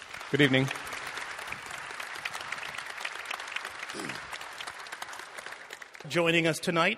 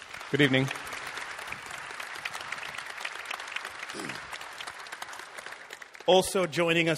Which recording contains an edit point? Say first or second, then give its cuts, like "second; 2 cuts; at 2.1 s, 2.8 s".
first; 1 cut; at 6.0 s